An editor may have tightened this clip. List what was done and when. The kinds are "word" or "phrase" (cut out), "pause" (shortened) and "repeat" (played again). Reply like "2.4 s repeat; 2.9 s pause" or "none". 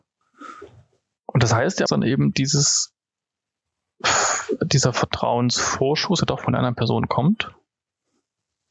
1.9 s phrase